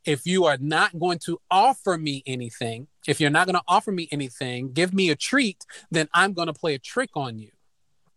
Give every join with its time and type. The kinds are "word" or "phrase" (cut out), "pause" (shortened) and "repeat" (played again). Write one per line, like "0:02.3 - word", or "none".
0:03.0 - pause